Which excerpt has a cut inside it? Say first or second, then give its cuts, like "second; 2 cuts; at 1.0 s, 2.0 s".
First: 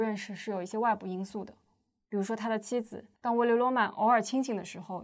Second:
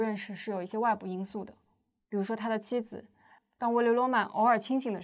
first; 1 cut; at 3.2 s